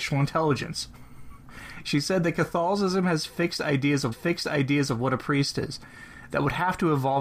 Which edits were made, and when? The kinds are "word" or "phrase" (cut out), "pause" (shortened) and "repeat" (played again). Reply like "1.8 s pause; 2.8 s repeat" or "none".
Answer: 4.1 s repeat